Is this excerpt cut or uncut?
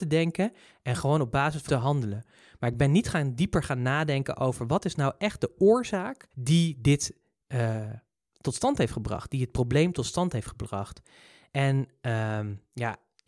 cut